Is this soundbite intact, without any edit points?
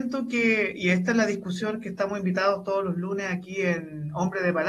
yes; 0 cuts

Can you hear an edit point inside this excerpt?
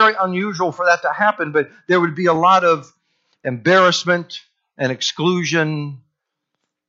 no; 0 cuts

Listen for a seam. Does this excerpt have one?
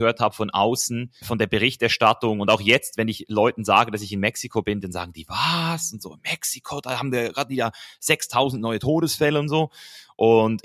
no; 0 cuts

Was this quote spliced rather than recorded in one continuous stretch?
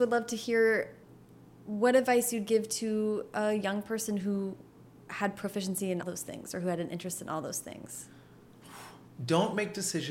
yes; 1 cut; at 6.0 s

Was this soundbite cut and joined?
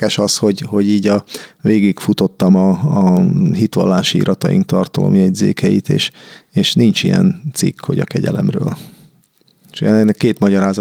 no; 0 cuts

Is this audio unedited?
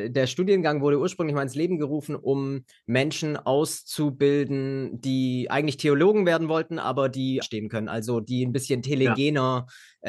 no; 1 cut; at 7.4 s

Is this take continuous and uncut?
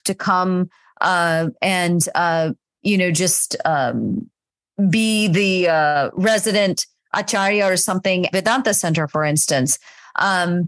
no; 1 cut; at 8.3 s

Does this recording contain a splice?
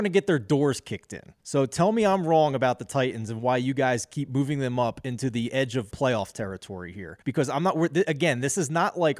yes; 3 cuts; at 1.4 s, 5.9 s, 7.2 s

